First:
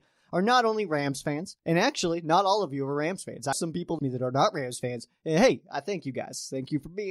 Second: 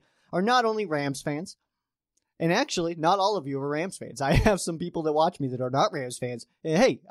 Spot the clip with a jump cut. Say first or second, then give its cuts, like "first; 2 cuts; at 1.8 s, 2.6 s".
first; 3 cuts; at 1.6 s, 3.5 s, 4.0 s